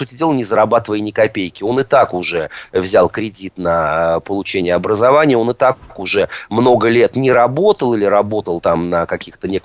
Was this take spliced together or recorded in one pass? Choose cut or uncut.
uncut